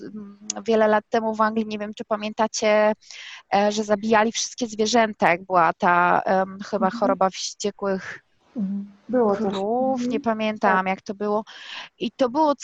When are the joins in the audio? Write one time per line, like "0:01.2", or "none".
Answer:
none